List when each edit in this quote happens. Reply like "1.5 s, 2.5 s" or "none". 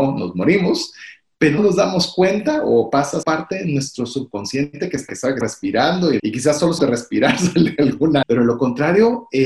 1.6 s, 3.2 s, 5.1 s, 5.4 s, 6.2 s, 6.8 s, 8.2 s